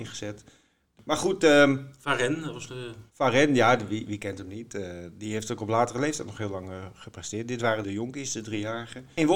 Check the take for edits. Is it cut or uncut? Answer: cut